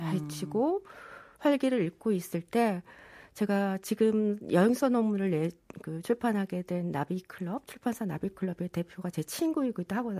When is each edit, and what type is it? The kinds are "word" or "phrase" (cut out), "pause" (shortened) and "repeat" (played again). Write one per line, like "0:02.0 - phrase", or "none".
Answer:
none